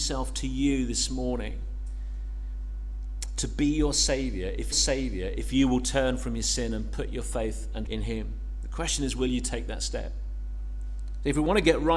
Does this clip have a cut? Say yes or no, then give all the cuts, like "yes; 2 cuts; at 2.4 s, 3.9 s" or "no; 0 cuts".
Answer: yes; 2 cuts; at 4.7 s, 7.9 s